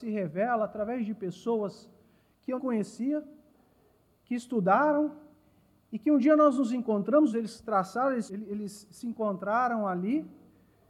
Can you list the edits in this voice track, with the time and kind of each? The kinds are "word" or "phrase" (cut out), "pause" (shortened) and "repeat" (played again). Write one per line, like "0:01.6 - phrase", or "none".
0:02.6 - word
0:07.3 - phrase
0:07.6 - word
0:08.3 - word

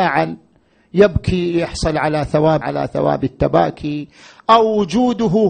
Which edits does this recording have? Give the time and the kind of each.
0:02.6 - phrase

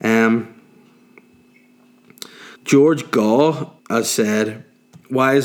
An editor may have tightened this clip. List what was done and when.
0:02.5 - pause
0:03.8 - pause

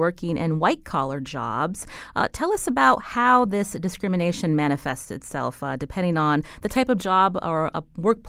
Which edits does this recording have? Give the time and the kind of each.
none

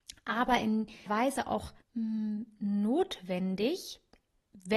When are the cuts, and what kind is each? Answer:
0:01.1 - word
0:01.8 - pause

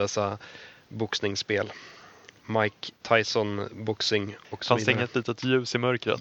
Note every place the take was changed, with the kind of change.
none

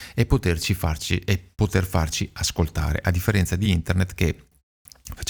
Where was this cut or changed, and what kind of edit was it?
none

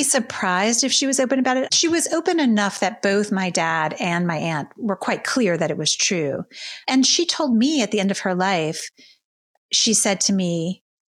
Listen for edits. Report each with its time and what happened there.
none

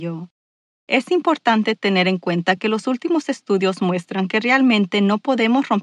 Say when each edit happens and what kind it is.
none

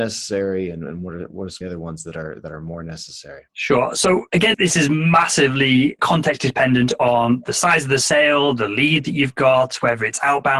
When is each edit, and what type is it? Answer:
0:01.6 - phrase
0:03.5 - pause
0:04.5 - word
0:06.0 - word

